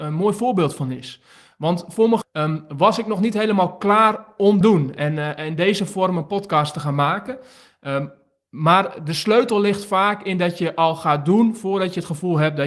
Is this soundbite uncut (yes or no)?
no